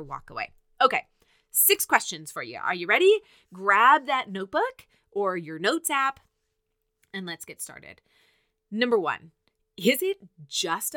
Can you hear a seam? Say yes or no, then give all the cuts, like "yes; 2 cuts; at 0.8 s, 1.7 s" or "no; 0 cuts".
no; 0 cuts